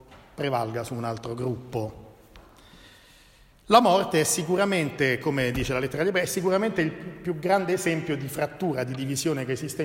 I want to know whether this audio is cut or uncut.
uncut